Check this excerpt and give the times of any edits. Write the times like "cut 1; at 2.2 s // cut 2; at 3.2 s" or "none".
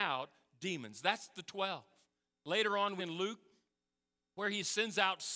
cut 1; at 3.0 s